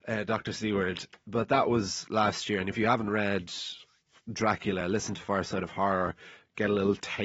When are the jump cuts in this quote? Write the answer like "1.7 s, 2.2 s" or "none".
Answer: none